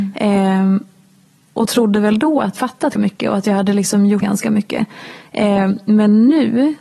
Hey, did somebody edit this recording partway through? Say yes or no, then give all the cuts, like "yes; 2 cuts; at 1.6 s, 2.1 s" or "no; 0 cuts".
yes; 3 cuts; at 2.6 s, 3.0 s, 4.2 s